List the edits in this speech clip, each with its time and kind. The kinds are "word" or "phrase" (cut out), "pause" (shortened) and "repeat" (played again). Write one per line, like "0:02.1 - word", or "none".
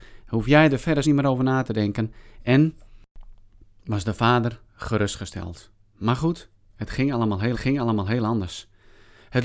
0:01.0 - word
0:07.5 - repeat